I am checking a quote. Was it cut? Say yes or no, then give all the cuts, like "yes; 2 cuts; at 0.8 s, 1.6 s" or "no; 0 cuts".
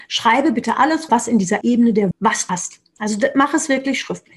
yes; 4 cuts; at 1.1 s, 1.6 s, 2.1 s, 2.5 s